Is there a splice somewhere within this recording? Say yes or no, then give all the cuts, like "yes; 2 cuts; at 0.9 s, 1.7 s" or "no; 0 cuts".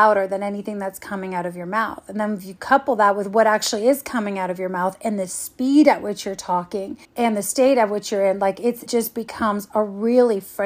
yes; 2 cuts; at 7.0 s, 8.9 s